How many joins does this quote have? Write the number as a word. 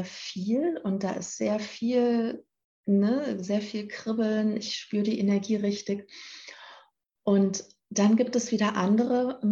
zero